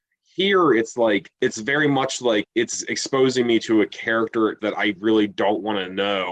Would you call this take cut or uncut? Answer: cut